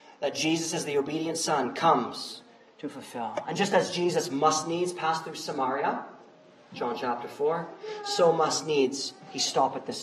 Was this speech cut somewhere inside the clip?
no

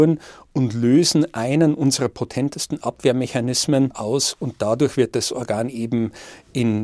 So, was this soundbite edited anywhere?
no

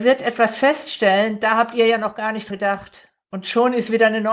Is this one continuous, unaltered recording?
no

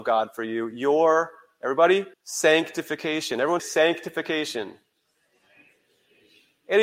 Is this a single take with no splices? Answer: no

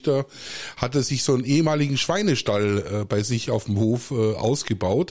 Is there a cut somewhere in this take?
no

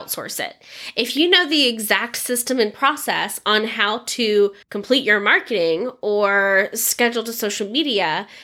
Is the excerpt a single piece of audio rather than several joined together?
no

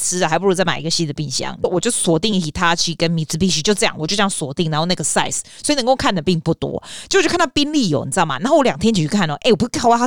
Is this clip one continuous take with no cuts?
yes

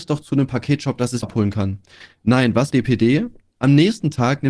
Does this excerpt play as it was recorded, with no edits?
no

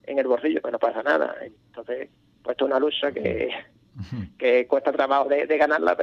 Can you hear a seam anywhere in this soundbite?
no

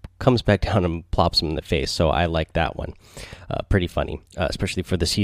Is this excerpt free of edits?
no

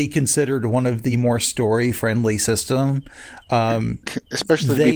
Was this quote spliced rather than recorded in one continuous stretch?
no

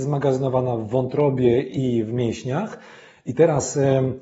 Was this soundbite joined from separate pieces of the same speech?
no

